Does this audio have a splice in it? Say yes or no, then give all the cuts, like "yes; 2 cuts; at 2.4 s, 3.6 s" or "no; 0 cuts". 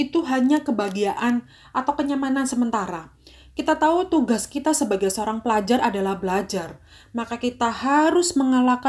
no; 0 cuts